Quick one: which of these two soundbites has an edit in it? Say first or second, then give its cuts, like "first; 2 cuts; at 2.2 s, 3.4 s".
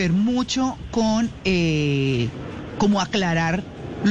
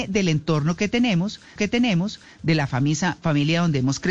second; 1 cut; at 1.6 s